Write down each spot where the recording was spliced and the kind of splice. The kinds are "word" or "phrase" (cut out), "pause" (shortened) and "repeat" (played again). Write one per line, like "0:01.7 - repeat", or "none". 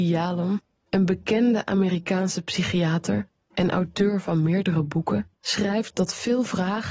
0:05.3 - pause